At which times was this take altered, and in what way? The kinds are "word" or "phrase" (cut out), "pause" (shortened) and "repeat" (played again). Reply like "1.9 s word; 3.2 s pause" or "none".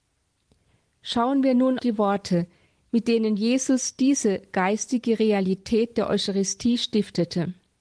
1.8 s word